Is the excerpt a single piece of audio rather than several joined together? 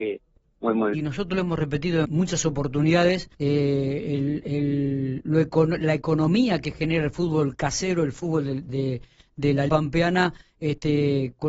no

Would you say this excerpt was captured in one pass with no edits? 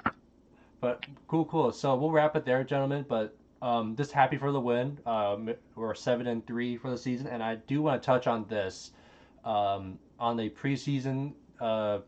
yes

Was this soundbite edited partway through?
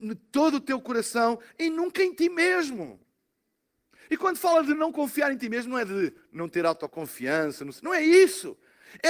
no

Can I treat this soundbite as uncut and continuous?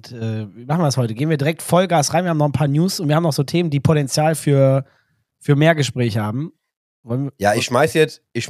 yes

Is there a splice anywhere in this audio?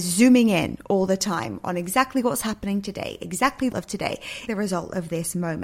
yes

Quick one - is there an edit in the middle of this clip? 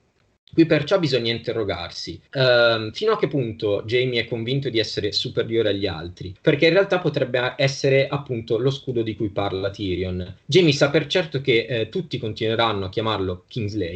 yes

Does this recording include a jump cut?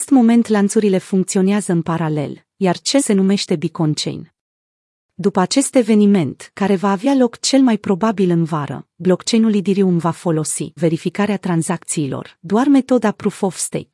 yes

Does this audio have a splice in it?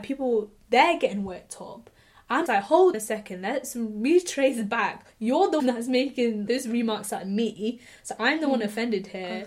yes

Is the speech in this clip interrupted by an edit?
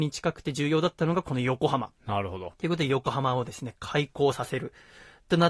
yes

